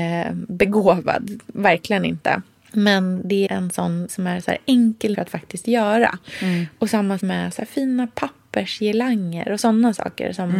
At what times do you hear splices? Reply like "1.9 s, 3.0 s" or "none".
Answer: 3.5 s, 4.1 s, 5.1 s, 7.2 s